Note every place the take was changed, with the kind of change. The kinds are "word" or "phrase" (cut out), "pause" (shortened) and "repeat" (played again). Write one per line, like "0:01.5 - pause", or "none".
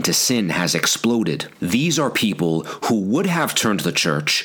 0:01.5 - pause